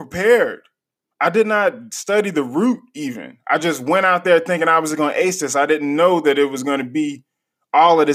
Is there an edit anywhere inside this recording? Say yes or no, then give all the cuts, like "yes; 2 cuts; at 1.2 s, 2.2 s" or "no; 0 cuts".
no; 0 cuts